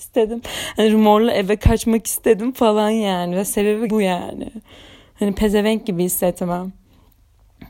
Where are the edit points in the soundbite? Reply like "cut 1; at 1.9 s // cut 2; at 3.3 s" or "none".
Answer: cut 1; at 3.9 s